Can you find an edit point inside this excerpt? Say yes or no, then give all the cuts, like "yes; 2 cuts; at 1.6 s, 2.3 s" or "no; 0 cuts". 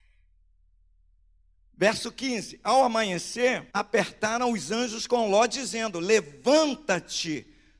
yes; 1 cut; at 3.7 s